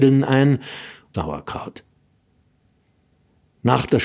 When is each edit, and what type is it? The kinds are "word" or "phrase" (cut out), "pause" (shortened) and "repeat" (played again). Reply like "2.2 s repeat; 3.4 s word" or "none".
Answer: 1.1 s phrase